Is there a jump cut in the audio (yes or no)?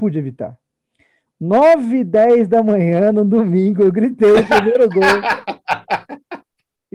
no